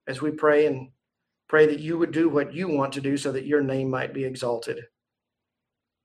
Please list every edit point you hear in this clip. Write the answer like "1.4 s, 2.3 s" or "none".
none